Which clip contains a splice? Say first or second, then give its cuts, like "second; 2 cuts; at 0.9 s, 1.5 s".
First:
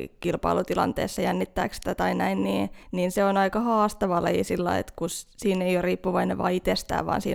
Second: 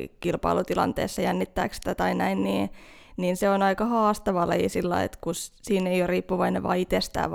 first; 1 cut; at 2.8 s